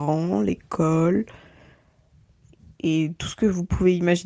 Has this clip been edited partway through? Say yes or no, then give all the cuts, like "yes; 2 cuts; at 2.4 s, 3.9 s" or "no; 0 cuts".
no; 0 cuts